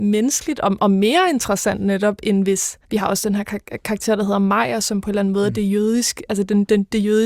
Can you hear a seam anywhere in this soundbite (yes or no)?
yes